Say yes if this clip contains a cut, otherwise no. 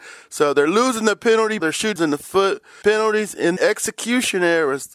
yes